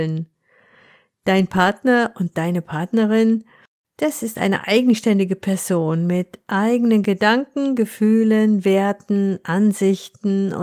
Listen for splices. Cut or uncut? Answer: uncut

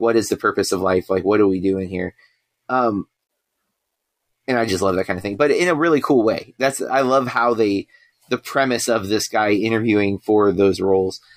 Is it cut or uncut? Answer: uncut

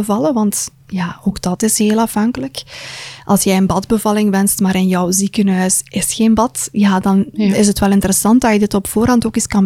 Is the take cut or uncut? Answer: uncut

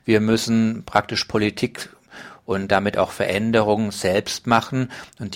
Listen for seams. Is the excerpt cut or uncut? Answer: uncut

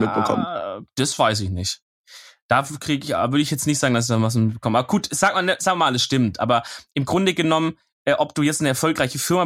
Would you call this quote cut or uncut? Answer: uncut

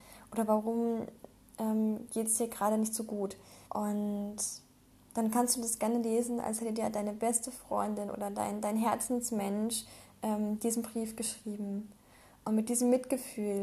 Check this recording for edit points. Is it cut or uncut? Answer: cut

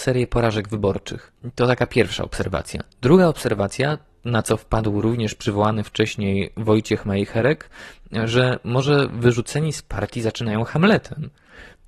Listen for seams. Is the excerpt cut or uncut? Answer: cut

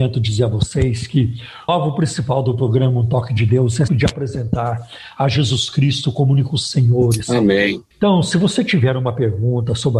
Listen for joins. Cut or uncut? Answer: cut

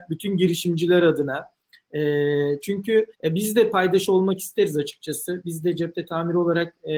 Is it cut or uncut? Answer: cut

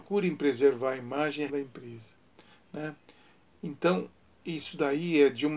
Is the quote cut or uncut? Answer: cut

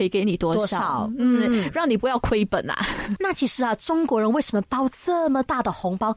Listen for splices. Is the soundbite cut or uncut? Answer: uncut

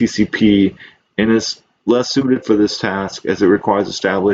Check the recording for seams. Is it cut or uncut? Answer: uncut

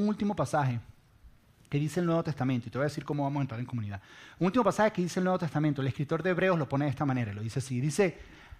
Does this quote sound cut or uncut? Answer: uncut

